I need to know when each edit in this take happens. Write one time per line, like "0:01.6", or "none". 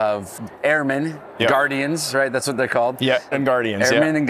0:03.3